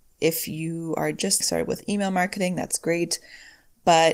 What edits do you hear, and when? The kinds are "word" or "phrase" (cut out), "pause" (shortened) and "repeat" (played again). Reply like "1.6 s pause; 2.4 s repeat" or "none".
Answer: 1.4 s phrase